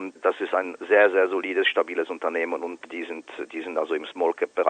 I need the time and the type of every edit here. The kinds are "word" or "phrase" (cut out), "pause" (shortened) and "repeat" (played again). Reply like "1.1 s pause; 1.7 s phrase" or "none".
none